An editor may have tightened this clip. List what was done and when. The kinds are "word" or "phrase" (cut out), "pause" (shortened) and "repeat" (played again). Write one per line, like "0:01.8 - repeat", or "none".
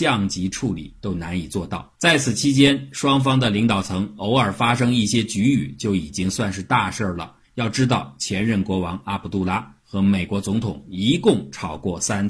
0:01.9 - pause
0:07.4 - pause